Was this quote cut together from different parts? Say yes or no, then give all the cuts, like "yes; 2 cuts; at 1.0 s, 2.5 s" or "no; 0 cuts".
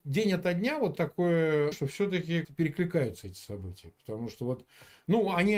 yes; 3 cuts; at 1.0 s, 1.7 s, 2.4 s